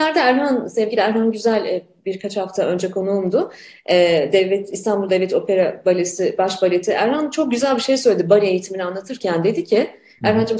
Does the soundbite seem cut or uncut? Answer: uncut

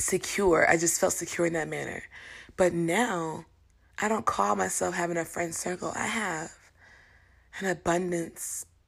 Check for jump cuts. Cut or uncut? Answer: uncut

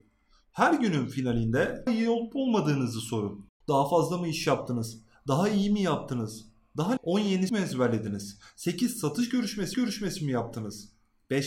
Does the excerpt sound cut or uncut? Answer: cut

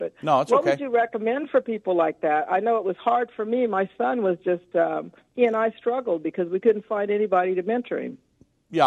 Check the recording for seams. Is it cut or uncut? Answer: uncut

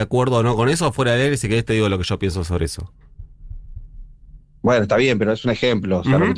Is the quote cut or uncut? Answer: uncut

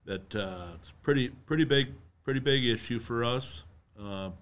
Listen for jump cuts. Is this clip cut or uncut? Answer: uncut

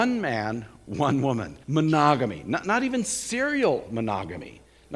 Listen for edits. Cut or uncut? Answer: cut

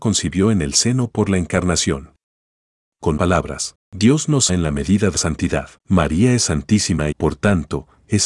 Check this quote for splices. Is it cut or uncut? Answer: cut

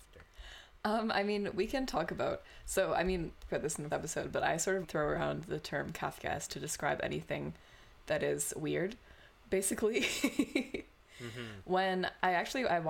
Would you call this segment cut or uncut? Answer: cut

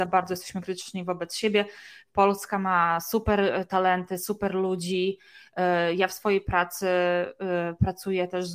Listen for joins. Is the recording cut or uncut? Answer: uncut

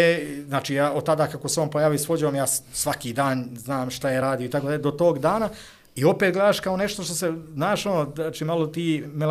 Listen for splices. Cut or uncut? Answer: uncut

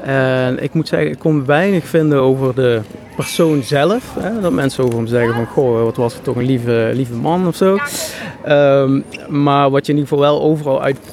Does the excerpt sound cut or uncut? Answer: uncut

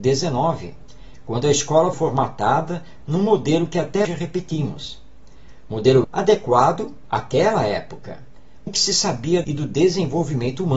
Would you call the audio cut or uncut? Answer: cut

